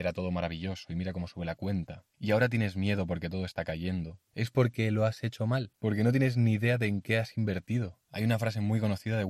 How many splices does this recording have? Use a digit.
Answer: 3